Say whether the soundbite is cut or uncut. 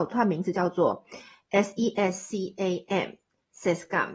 uncut